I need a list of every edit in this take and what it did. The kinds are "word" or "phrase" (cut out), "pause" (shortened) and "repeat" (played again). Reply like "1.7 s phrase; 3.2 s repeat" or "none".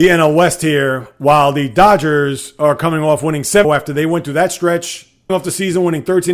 3.6 s phrase; 5.3 s word